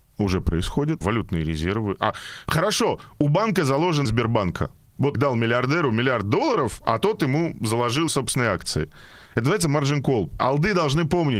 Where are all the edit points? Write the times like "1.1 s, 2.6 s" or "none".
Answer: 1.0 s, 4.0 s, 5.1 s, 8.1 s